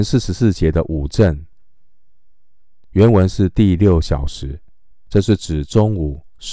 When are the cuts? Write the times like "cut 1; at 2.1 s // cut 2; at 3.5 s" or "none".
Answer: cut 1; at 4.9 s